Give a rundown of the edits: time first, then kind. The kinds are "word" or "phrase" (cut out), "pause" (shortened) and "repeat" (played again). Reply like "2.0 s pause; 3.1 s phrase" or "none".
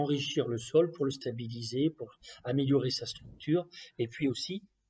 none